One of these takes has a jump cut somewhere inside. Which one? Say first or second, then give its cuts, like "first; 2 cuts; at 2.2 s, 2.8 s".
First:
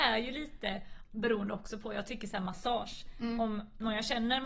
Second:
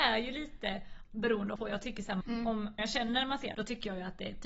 second; 4 cuts; at 1.6 s, 2.2 s, 2.8 s, 3.5 s